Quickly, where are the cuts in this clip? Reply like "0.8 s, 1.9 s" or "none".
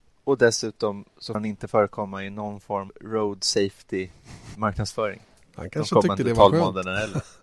1.3 s, 2.9 s, 4.5 s